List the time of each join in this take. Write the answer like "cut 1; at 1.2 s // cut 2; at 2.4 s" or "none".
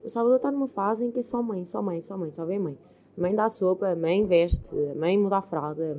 none